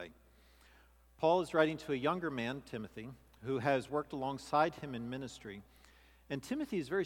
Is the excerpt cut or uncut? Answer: uncut